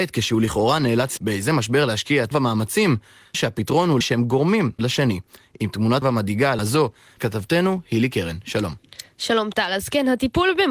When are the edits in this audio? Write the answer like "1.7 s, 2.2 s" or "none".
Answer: 1.2 s, 2.3 s, 3.3 s, 4.0 s, 4.8 s, 6.0 s, 6.6 s, 7.2 s